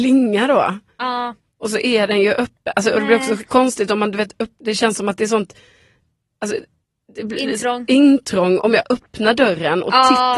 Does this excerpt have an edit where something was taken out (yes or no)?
no